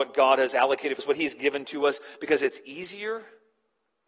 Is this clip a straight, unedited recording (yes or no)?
no